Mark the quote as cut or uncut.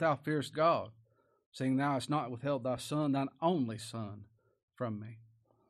uncut